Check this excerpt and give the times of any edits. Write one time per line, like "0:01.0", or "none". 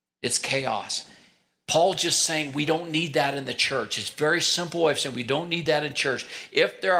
none